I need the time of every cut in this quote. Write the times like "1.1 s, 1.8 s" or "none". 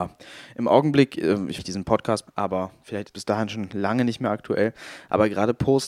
1.6 s, 2.3 s, 3.1 s